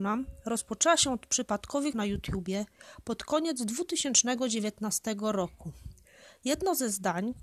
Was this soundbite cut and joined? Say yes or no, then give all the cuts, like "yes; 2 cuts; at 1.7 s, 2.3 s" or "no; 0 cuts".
yes; 1 cut; at 1.9 s